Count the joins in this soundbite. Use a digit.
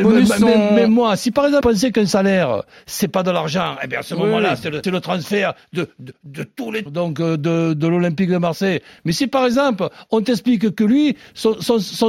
3